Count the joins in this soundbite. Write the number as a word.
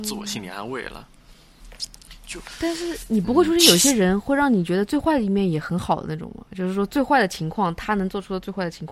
zero